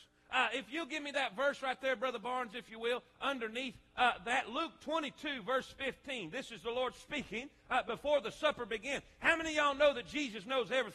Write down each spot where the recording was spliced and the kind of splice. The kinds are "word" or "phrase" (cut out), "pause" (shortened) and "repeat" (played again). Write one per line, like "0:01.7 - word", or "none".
none